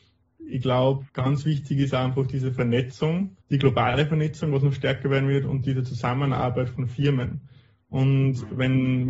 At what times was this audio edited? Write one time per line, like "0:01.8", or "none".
0:01.1
0:03.4